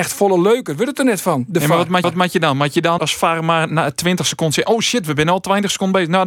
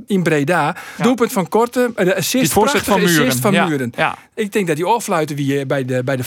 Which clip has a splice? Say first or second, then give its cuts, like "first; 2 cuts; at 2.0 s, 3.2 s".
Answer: first; 2 cuts; at 2.0 s, 3.0 s